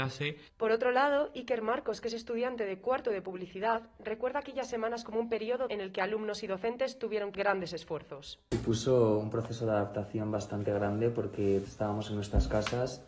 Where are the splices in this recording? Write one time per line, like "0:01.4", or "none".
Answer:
0:05.7
0:07.3
0:11.7